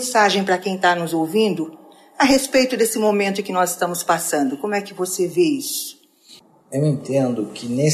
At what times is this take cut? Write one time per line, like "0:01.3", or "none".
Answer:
none